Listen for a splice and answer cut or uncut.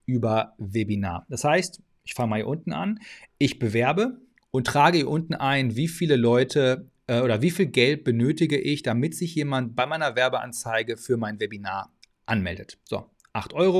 uncut